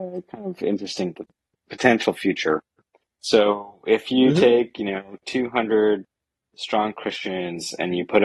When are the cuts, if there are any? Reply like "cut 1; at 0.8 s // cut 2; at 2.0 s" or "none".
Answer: cut 1; at 1.1 s